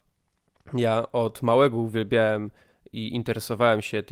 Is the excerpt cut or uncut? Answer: uncut